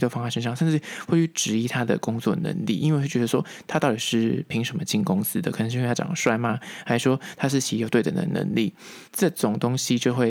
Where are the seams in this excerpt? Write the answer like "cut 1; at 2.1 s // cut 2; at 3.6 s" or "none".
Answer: cut 1; at 9.1 s

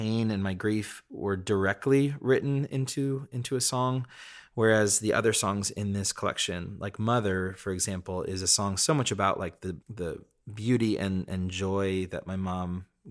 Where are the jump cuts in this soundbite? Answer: cut 1; at 9.8 s

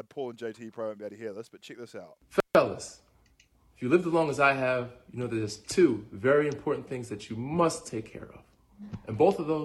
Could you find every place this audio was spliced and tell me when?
cut 1; at 2.5 s

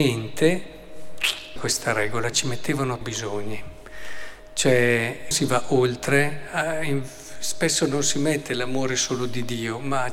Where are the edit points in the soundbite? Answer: cut 1; at 1.6 s // cut 2; at 2.3 s // cut 3; at 3.0 s // cut 4; at 5.3 s

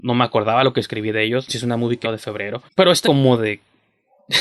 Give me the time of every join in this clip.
cut 1; at 1.5 s // cut 2; at 2.0 s // cut 3; at 2.7 s // cut 4; at 3.0 s

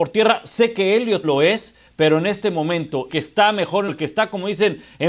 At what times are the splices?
cut 1; at 1.2 s // cut 2; at 3.1 s // cut 3; at 3.9 s

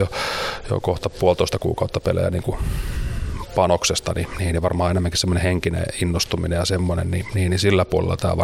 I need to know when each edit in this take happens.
none

